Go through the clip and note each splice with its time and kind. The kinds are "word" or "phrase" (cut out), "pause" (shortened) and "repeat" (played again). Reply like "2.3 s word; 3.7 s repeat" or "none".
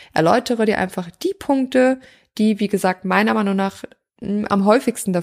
none